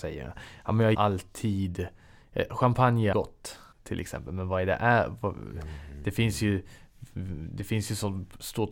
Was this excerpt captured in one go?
no; 3 cuts; at 0.9 s, 3.1 s, 3.7 s

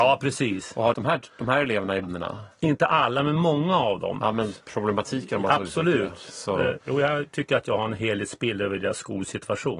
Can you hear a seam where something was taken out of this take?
yes; 2 cuts; at 0.9 s, 2.0 s

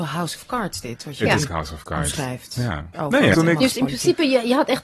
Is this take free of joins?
no; 3 cuts; at 1.5 s, 2.9 s, 3.3 s

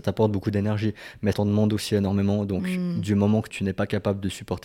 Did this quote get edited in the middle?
yes; 2 cuts; at 1.3 s, 3.5 s

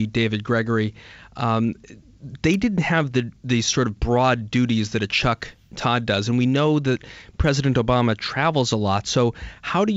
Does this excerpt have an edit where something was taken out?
no; 0 cuts

